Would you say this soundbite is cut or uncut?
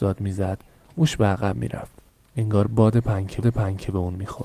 cut